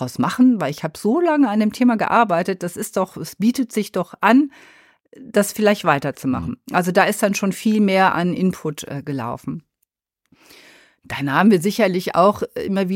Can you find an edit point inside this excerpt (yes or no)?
no